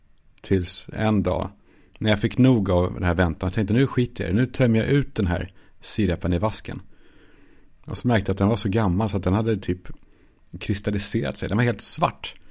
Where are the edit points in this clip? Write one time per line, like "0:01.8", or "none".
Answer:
none